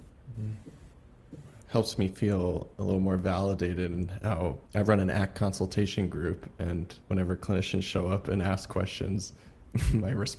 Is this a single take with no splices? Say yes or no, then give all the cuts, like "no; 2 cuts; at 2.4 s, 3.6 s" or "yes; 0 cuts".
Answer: no; 4 cuts; at 1.6 s, 2.7 s, 4.7 s, 7.0 s